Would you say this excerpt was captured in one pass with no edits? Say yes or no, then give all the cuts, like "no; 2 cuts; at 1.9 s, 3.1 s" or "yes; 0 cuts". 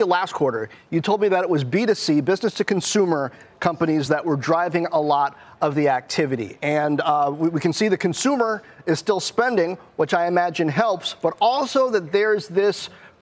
yes; 0 cuts